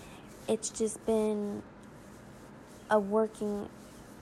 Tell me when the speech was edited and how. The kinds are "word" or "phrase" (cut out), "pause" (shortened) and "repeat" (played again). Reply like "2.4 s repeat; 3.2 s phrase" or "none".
none